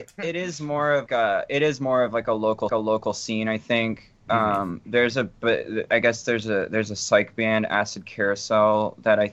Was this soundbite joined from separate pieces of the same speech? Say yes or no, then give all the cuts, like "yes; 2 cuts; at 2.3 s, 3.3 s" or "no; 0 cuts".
yes; 2 cuts; at 1.1 s, 2.7 s